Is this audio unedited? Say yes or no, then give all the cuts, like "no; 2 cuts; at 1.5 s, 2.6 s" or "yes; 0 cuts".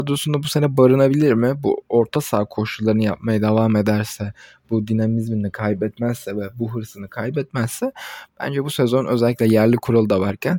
yes; 0 cuts